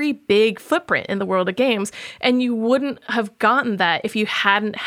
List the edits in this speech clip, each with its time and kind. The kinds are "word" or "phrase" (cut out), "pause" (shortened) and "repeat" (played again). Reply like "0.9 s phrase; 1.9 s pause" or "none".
none